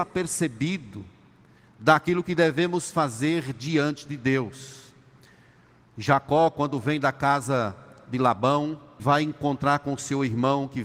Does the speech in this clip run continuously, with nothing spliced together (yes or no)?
no